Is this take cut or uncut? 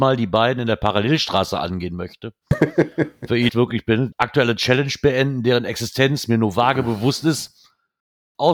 cut